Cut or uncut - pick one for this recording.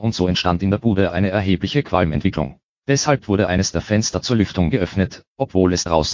cut